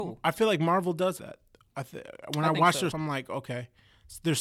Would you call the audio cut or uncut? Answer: cut